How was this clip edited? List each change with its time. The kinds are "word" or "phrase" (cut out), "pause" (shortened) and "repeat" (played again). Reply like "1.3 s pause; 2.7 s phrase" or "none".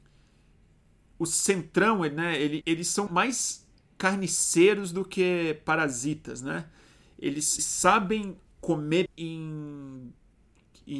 2.6 s word; 3.1 s word; 7.6 s word; 9.1 s word